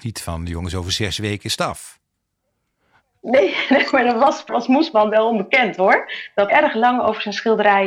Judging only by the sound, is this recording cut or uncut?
cut